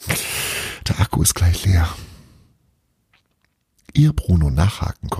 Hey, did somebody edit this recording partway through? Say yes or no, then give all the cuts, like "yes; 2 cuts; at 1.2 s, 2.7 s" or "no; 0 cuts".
no; 0 cuts